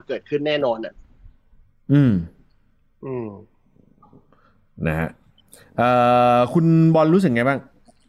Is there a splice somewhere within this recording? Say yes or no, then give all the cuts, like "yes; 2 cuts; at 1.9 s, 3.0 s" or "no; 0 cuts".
no; 0 cuts